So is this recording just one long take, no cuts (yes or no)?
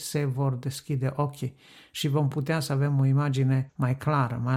yes